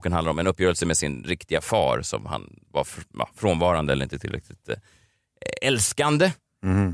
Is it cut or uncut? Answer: uncut